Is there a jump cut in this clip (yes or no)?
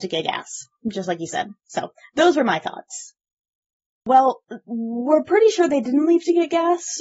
no